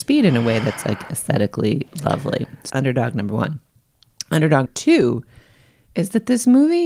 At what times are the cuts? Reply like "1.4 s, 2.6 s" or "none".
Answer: 1.1 s, 2.7 s, 4.7 s